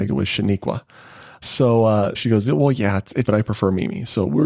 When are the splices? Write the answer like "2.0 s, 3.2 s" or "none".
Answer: 1.4 s, 2.1 s, 3.2 s